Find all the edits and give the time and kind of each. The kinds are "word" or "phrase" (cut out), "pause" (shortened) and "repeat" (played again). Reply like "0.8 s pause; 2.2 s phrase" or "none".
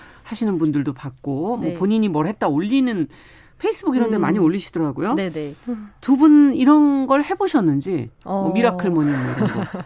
none

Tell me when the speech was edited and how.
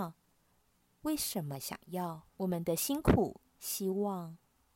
2.3 s pause; 3.5 s pause

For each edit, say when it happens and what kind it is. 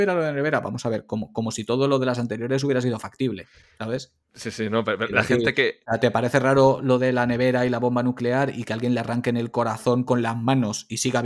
4.2 s pause

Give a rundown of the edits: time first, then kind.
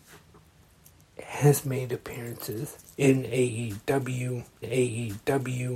2.8 s pause; 4.6 s repeat

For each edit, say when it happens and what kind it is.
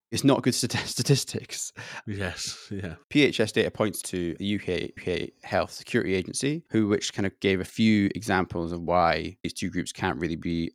3.0 s pause; 4.0 s word; 4.4 s word; 5.0 s repeat; 6.7 s pause

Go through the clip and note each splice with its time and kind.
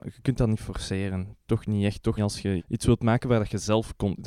2.2 s word; 2.6 s word

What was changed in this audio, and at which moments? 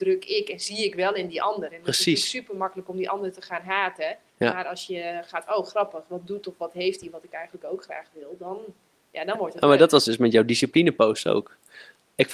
4.3 s pause; 5.5 s phrase

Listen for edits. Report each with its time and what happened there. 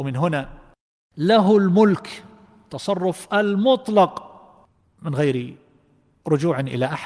none

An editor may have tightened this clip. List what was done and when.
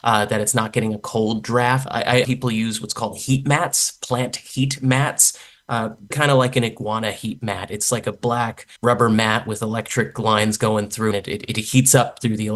1.9 s word; 2.2 s phrase; 6.1 s word; 8.8 s pause; 11.1 s phrase

